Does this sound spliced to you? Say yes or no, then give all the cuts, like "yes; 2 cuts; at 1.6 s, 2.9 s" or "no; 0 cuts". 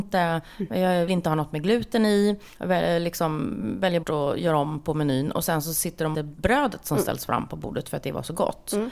yes; 3 cuts; at 1.1 s, 4.0 s, 6.1 s